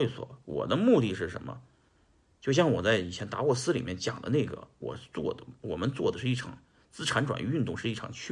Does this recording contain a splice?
no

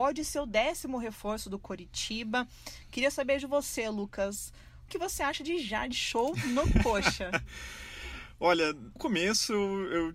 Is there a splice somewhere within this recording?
yes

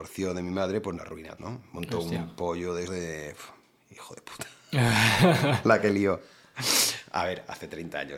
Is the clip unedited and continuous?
no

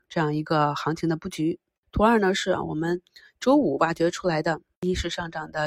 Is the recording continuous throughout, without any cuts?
yes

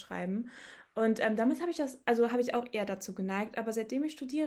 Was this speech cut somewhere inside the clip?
no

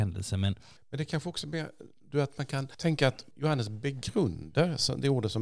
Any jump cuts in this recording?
no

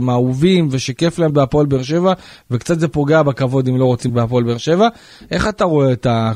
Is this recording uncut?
no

